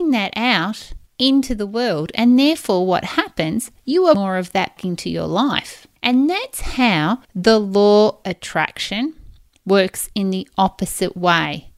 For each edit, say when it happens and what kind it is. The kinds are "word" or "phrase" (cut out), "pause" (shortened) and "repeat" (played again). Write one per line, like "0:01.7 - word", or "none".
0:01.1 - pause
0:04.1 - word
0:04.8 - word
0:06.0 - pause
0:07.2 - pause
0:08.2 - word